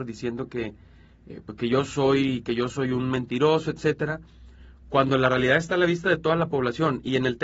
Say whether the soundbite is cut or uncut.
uncut